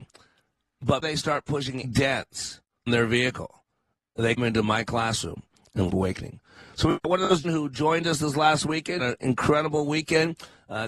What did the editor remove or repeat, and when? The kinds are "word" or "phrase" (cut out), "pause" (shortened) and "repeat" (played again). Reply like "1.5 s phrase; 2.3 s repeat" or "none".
1.0 s word; 1.8 s word; 2.9 s word; 4.4 s word; 5.9 s word; 7.4 s word; 9.0 s word